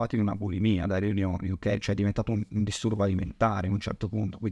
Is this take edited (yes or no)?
no